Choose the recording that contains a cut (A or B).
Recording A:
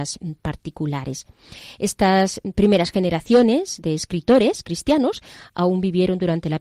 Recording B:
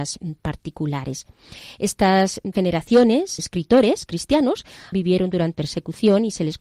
B